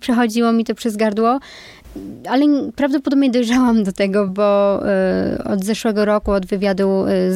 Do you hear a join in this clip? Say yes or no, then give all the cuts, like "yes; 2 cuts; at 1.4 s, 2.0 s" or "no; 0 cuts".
no; 0 cuts